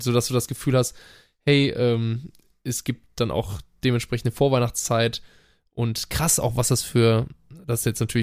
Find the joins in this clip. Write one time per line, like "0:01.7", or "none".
none